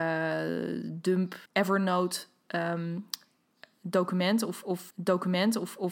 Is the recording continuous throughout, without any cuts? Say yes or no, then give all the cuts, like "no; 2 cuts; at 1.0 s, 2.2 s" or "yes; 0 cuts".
no; 2 cuts; at 1.5 s, 4.9 s